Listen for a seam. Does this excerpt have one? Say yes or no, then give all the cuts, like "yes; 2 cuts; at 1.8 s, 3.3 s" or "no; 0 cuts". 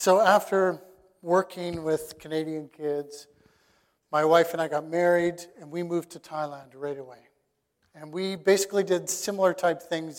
no; 0 cuts